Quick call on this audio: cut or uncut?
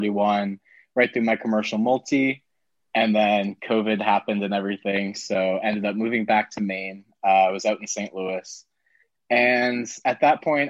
uncut